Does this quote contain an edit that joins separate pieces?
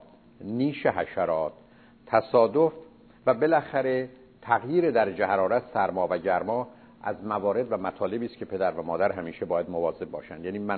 no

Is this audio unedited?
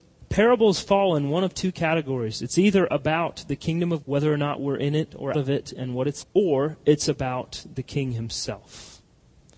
no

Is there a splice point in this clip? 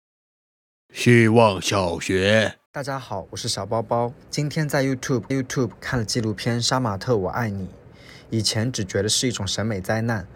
yes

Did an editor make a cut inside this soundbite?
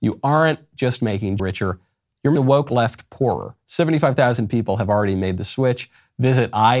yes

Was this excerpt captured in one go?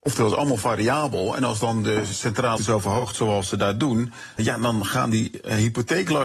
no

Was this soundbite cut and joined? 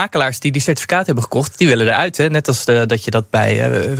no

